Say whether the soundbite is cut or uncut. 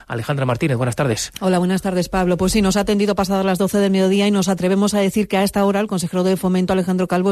uncut